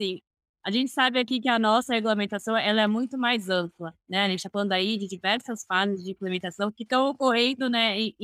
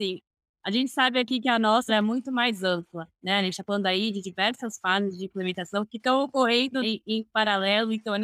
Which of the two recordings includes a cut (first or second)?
second